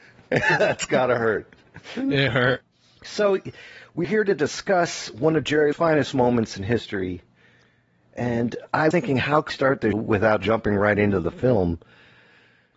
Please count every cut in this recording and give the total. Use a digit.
6